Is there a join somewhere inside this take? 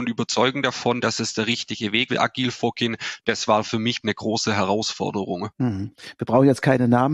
yes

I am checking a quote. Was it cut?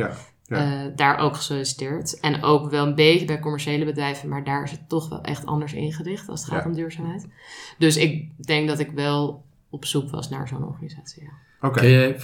no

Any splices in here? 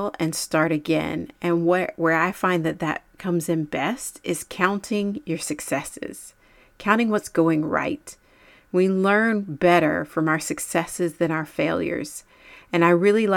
no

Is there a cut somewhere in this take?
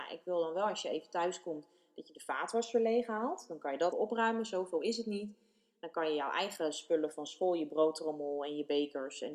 yes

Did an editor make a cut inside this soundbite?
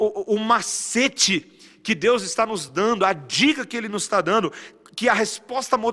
no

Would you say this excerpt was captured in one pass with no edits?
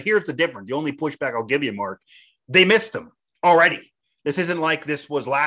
yes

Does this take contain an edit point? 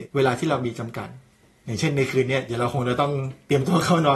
no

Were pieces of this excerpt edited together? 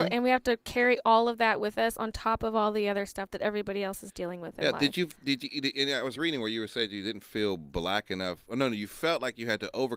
no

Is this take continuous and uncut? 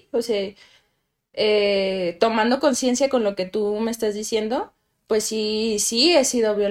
yes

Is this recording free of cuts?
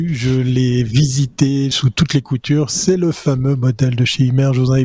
no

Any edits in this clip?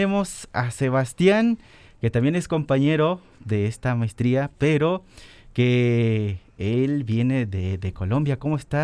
no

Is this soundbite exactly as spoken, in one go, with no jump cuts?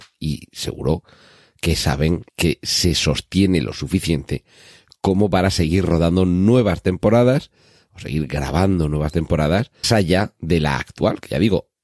no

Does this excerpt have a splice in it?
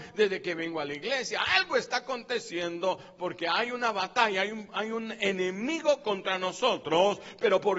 no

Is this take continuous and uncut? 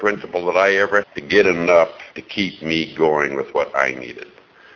no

